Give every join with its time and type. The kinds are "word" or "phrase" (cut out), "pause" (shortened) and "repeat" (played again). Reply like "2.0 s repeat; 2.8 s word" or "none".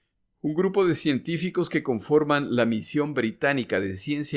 none